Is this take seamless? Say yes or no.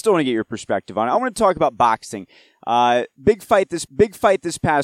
no